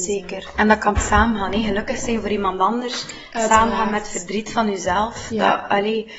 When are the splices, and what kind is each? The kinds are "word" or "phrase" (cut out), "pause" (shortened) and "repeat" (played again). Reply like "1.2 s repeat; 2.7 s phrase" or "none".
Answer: 1.0 s word